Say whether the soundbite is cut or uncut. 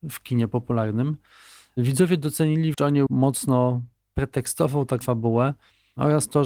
cut